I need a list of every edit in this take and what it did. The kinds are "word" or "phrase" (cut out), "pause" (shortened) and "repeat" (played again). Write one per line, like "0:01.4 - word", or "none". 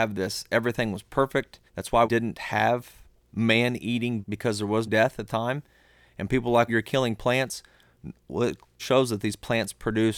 0:01.7 - pause
0:02.0 - word
0:04.2 - word
0:04.9 - word
0:05.3 - word
0:06.7 - word
0:08.8 - word